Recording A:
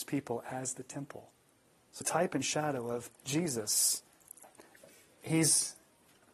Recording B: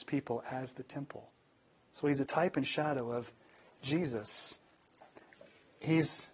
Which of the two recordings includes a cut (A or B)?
A